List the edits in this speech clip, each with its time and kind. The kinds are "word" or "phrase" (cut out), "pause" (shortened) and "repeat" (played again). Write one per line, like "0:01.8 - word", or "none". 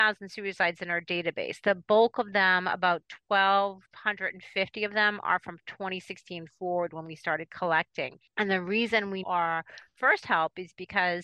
0:03.9 - pause
0:08.3 - pause
0:09.2 - word